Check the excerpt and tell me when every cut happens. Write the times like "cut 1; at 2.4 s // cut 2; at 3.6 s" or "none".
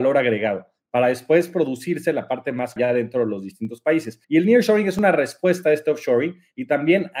cut 1; at 2.8 s // cut 2; at 4.2 s